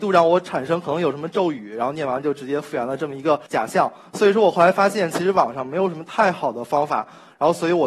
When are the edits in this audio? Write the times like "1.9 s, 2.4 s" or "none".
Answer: 3.5 s

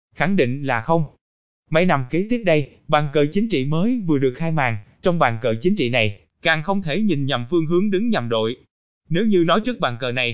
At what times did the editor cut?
none

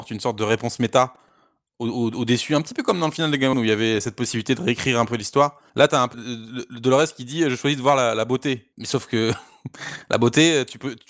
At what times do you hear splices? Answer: 3.5 s, 5.7 s, 6.1 s, 8.7 s

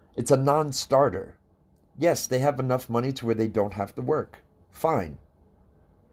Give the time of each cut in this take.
none

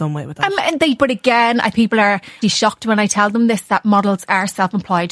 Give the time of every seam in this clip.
1.0 s, 1.7 s, 2.4 s

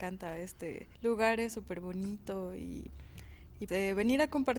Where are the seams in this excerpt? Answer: 0.9 s, 3.7 s

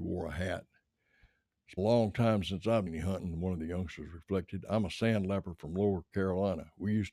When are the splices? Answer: 1.8 s, 2.9 s

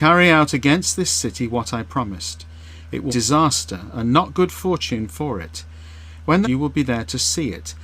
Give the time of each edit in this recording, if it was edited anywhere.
3.1 s, 6.4 s

